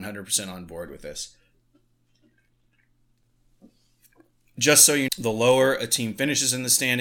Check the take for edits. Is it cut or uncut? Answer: cut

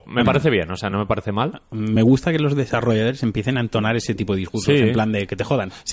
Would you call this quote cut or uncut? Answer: uncut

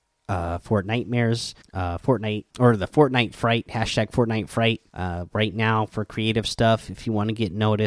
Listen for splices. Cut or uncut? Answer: cut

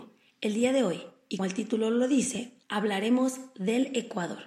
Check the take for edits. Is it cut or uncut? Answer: cut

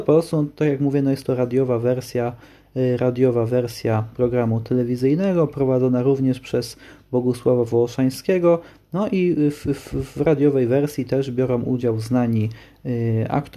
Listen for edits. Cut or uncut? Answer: uncut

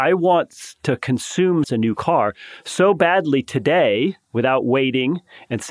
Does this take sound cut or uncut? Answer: cut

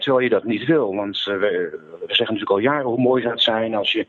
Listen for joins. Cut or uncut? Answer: uncut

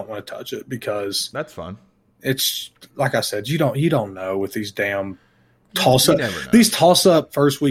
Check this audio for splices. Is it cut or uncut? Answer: uncut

